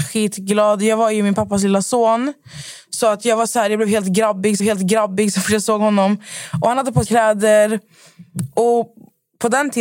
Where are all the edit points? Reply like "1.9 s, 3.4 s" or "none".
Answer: 4.6 s, 7.1 s